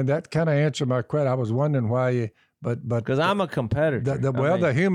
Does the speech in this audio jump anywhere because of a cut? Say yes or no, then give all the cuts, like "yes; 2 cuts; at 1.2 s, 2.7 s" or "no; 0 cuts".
no; 0 cuts